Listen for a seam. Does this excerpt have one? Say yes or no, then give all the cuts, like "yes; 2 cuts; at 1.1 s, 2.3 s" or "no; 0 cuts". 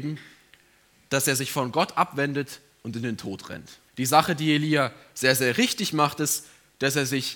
yes; 1 cut; at 3.9 s